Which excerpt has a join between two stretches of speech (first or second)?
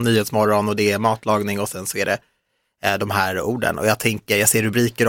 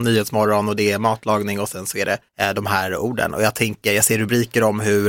second